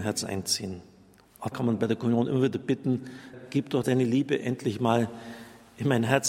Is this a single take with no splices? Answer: no; 3 cuts; at 1.5 s, 3.3 s, 3.8 s

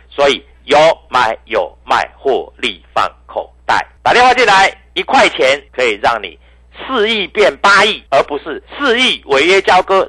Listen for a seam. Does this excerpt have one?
yes; 4 cuts; at 4.0 s, 5.7 s, 8.1 s, 8.7 s

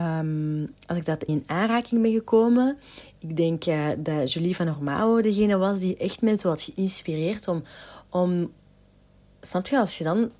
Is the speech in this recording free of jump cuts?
no; 1 cut; at 1.3 s

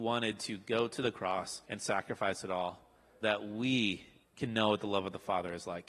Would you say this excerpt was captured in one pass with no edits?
no; 3 cuts; at 1.6 s, 3.2 s, 4.2 s

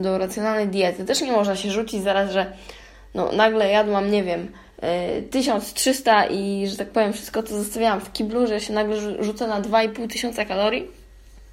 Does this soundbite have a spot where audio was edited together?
no; 0 cuts

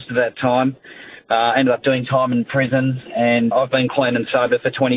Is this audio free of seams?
no; 1 cut; at 3.5 s

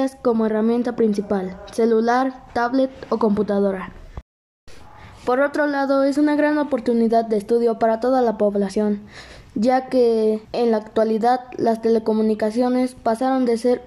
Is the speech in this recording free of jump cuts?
no; 1 cut; at 10.4 s

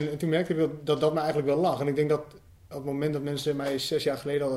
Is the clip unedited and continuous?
yes; 0 cuts

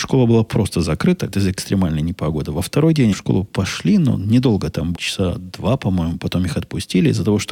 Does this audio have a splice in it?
yes; 3 cuts; at 1.3 s, 3.1 s, 4.9 s

